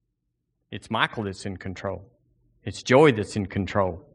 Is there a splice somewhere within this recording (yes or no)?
no